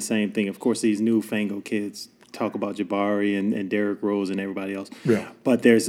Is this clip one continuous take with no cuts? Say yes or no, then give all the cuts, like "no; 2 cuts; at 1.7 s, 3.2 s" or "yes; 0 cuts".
yes; 0 cuts